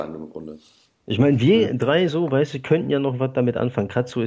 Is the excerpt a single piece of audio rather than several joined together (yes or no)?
yes